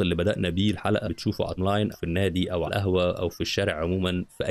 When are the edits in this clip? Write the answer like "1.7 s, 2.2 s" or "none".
1.0 s, 1.6 s, 1.9 s, 2.7 s